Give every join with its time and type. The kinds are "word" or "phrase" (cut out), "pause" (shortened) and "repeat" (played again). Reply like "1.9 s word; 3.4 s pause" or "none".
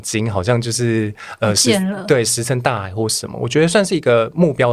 none